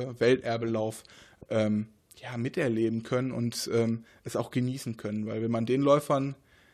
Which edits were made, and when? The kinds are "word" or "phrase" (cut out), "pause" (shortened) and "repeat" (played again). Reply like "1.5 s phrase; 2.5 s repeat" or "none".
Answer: none